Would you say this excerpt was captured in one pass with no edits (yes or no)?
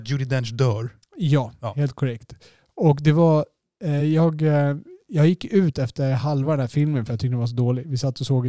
yes